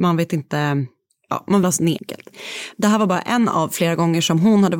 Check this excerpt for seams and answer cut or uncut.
cut